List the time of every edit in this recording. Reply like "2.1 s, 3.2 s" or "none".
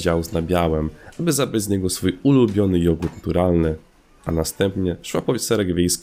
none